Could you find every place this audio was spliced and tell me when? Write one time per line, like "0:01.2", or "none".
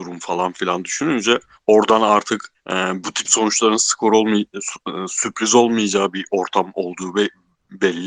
0:01.5
0:02.5